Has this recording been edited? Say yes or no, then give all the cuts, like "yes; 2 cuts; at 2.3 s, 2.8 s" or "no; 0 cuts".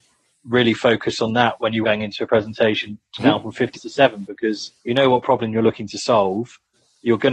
yes; 4 cuts; at 1.8 s, 3.2 s, 3.7 s, 4.8 s